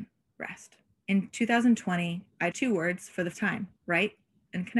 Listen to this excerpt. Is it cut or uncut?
cut